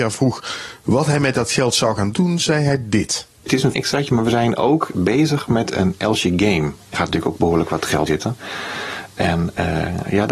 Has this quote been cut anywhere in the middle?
yes; 5 cuts; at 2.1 s, 3.7 s, 4.9 s, 6.9 s, 8.1 s

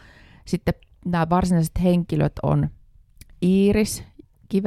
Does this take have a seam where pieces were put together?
no; 0 cuts

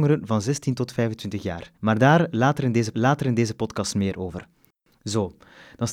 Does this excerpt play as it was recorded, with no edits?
no; 2 cuts; at 1.8 s, 2.9 s

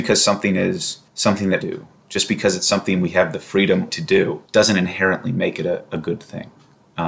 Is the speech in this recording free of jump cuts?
no; 4 cuts; at 1.1 s, 1.6 s, 3.9 s, 4.5 s

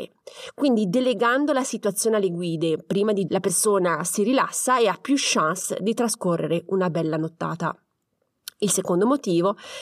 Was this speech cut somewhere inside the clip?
yes; 1 cut; at 3.3 s

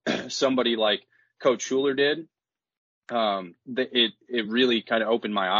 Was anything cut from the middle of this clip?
no; 0 cuts

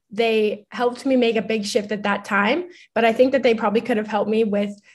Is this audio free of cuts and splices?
yes; 0 cuts

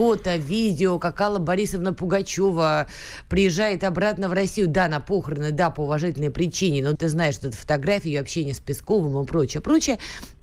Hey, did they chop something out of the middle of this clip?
yes; 1 cut; at 7.0 s

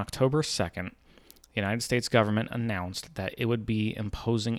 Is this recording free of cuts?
yes; 0 cuts

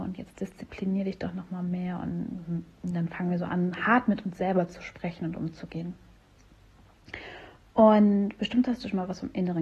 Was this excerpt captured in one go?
yes; 0 cuts

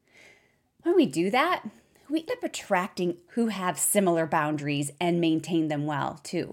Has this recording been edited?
yes; 2 cuts; at 2.3 s, 3.3 s

